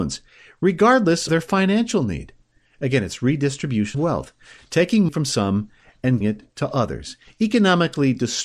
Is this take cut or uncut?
cut